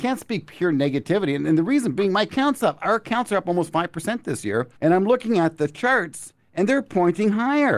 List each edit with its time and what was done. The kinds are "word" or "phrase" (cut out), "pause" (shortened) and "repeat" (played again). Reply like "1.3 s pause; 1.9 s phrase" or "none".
4.8 s pause